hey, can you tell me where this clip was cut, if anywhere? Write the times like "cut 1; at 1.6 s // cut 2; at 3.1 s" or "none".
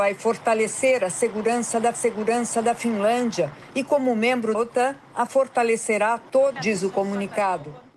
cut 1; at 1.9 s // cut 2; at 4.5 s // cut 3; at 5.3 s // cut 4; at 6.6 s

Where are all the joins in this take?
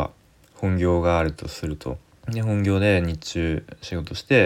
cut 1; at 2.1 s

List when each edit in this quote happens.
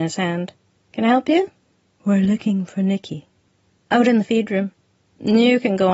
none

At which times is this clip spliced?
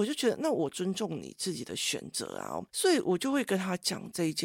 cut 1; at 2.7 s

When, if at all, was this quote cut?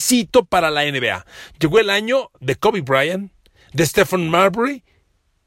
none

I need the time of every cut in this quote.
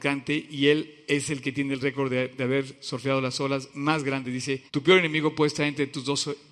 cut 1; at 4.7 s

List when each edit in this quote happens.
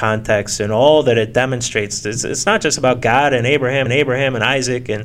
cut 1; at 3.9 s

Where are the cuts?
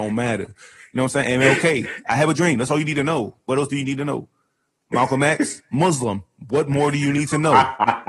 none

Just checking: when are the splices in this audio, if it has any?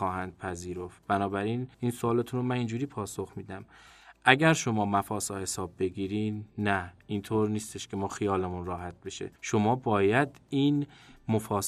cut 1; at 1.7 s // cut 2; at 9.4 s

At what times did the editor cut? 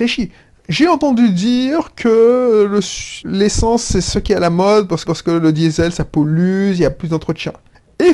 cut 1; at 3.2 s // cut 2; at 5.0 s

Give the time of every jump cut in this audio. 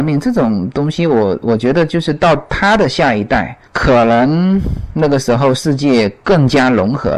cut 1; at 3.6 s

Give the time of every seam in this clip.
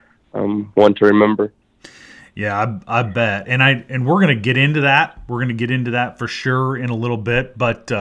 none

